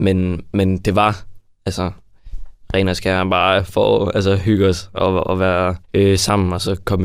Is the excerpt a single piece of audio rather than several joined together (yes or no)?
no